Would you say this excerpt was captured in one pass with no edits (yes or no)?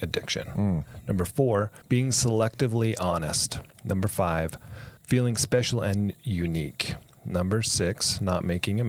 no